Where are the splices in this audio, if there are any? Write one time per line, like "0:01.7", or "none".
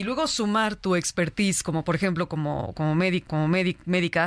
0:03.3